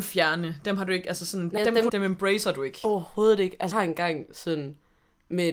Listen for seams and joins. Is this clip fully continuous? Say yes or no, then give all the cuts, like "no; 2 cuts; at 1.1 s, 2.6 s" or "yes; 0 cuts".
no; 3 cuts; at 1.6 s, 1.9 s, 3.7 s